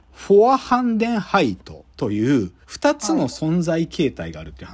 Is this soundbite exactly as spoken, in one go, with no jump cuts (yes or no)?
no